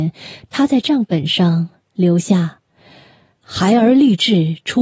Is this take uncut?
yes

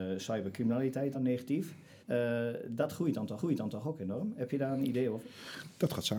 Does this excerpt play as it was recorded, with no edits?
no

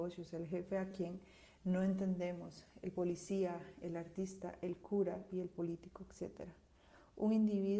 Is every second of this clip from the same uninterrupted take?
yes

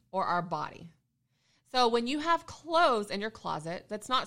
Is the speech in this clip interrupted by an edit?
no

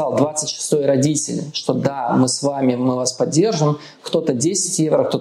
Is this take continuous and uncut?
yes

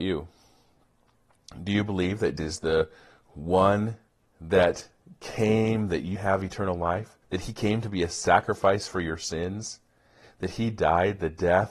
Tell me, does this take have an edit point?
yes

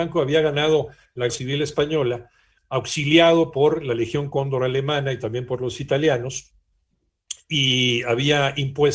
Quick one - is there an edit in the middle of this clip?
yes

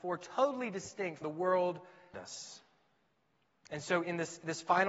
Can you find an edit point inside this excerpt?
yes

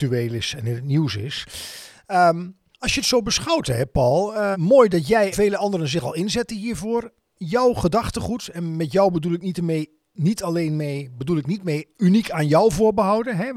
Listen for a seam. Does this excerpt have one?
yes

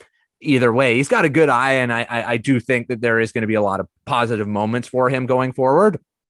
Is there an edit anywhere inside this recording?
yes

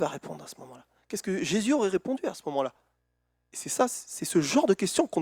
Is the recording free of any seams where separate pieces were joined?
yes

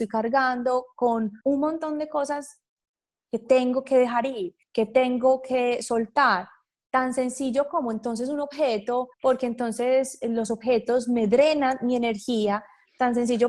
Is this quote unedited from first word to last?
no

